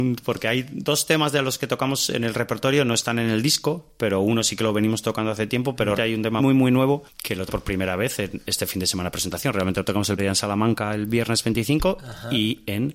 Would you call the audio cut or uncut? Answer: cut